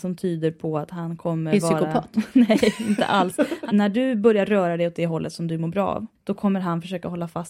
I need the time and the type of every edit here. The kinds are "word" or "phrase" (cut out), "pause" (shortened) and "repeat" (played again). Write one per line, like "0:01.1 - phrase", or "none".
0:06.2 - pause